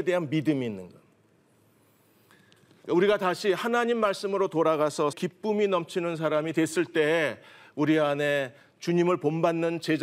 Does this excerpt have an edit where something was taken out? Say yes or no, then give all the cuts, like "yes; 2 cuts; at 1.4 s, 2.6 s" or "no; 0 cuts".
yes; 1 cut; at 5.1 s